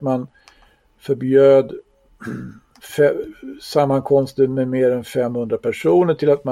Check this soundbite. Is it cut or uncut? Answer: uncut